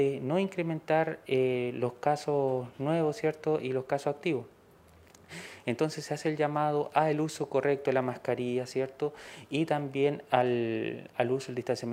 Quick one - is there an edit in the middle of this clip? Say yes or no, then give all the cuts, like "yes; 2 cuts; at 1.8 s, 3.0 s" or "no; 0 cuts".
no; 0 cuts